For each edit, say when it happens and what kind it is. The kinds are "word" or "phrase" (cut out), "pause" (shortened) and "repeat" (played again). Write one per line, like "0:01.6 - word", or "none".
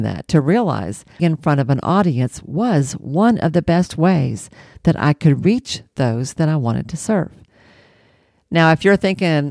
0:01.2 - phrase